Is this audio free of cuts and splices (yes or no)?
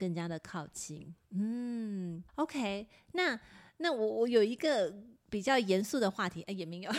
no